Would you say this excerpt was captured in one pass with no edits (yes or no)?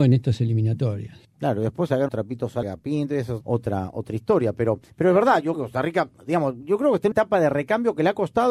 no